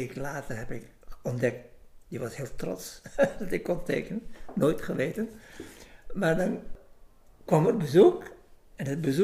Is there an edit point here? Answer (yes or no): no